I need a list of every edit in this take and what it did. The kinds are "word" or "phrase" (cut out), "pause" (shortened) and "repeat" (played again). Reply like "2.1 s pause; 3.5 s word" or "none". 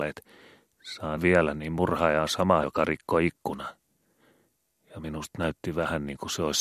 1.2 s word; 2.6 s word